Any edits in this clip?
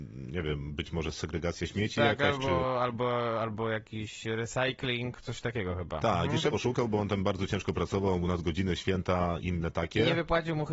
yes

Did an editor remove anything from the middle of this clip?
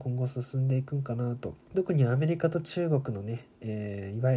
yes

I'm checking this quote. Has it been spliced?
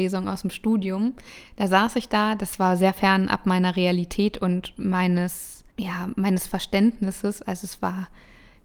yes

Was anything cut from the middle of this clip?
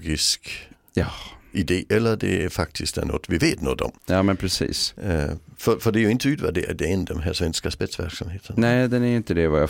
yes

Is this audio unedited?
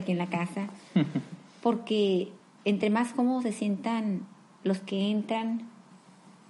yes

